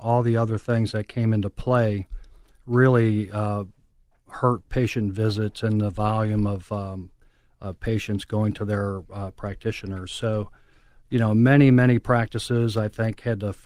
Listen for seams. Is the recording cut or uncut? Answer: uncut